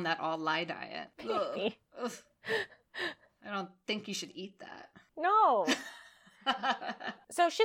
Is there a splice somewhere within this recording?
no; 0 cuts

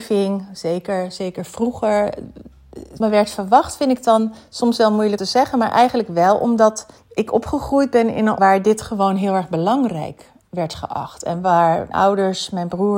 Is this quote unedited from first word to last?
no; 5 cuts; at 3.0 s, 5.2 s, 7.0 s, 8.4 s, 11.9 s

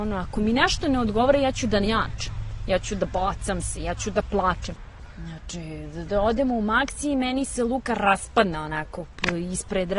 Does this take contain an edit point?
yes; 1 cut; at 6.1 s

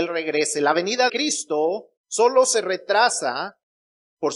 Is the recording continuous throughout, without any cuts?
no; 2 cuts; at 1.1 s, 2.0 s

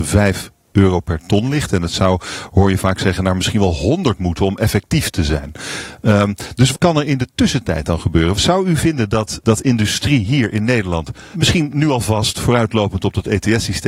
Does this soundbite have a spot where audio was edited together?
yes; 3 cuts; at 6.7 s, 9.4 s, 11.3 s

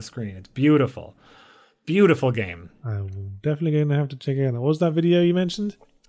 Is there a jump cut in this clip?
no; 0 cuts

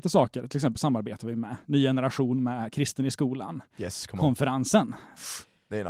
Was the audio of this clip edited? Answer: no; 0 cuts

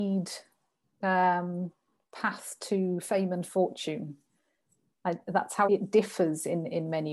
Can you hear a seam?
yes; 1 cut; at 5.7 s

